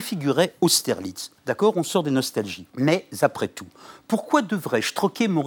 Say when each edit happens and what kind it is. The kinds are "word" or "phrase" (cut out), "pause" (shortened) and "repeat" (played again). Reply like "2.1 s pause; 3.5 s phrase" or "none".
1.4 s pause; 2.7 s pause